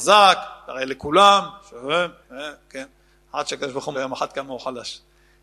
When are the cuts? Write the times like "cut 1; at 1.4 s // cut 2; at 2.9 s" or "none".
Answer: cut 1; at 2.2 s // cut 2; at 3.9 s